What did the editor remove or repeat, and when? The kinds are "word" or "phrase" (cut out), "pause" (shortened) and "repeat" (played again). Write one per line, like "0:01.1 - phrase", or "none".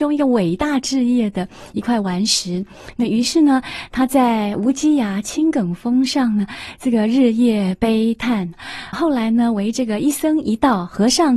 0:08.9 - word